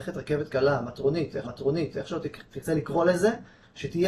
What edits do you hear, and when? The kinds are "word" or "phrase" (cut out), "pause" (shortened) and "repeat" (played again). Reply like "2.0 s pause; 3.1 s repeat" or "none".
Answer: 1.4 s repeat